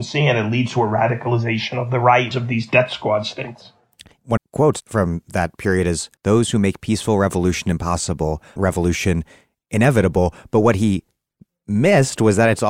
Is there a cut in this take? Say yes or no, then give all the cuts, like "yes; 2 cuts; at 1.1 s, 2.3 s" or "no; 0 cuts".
yes; 4 cuts; at 2.3 s, 4.4 s, 6.2 s, 8.6 s